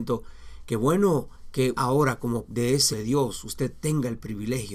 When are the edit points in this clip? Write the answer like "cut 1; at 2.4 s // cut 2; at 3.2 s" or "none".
cut 1; at 1.7 s // cut 2; at 2.4 s // cut 3; at 2.9 s